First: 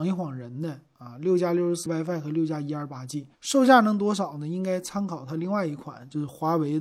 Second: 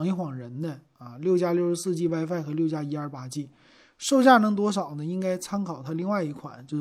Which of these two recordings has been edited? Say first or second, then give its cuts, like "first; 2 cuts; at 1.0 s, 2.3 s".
first; 2 cuts; at 1.9 s, 3.3 s